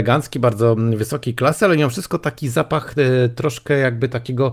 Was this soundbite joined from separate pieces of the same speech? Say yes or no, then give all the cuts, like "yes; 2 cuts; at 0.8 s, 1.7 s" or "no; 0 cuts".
no; 0 cuts